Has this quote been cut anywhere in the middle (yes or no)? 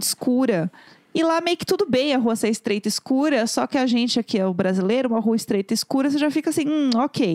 no